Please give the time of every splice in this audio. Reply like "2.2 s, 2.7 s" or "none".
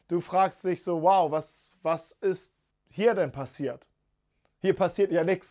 none

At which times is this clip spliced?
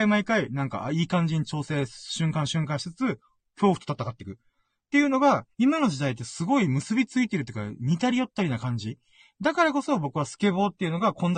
5.5 s

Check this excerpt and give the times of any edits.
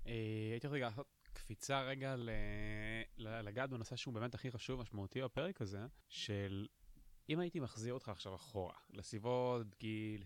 6.0 s, 8.8 s

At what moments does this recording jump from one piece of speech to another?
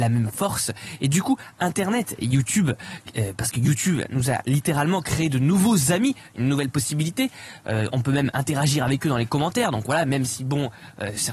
none

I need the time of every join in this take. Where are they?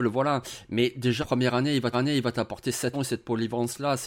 1.2 s, 1.9 s, 2.9 s

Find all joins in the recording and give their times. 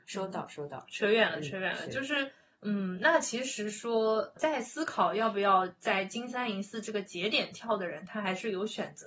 none

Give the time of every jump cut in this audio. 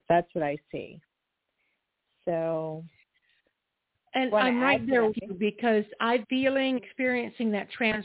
4.3 s, 5.1 s, 6.2 s, 6.8 s

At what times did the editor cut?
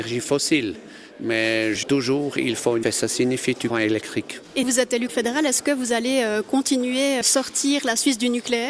1.8 s, 2.8 s, 3.7 s, 4.6 s, 5.1 s, 7.2 s

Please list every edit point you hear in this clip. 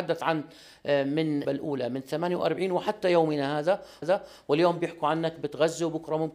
1.4 s, 4.0 s

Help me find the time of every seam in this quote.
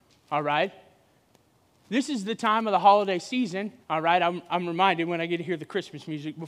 3.8 s

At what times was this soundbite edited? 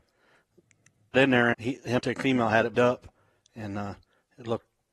1.1 s, 1.5 s, 2.0 s, 2.7 s

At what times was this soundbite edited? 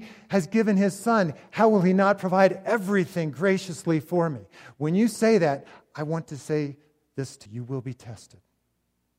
7.5 s

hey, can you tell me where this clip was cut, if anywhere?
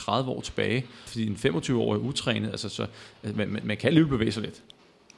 1.1 s

